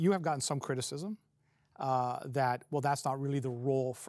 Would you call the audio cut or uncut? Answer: uncut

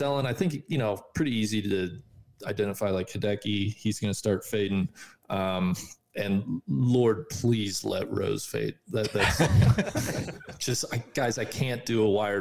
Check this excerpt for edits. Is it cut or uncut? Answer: uncut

